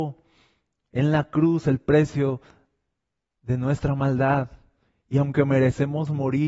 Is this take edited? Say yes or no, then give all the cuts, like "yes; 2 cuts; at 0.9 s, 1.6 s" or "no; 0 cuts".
no; 0 cuts